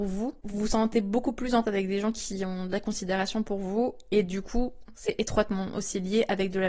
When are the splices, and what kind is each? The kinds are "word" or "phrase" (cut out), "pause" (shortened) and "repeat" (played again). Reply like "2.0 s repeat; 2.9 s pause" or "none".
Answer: 1.6 s word